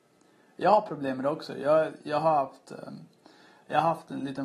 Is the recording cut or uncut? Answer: uncut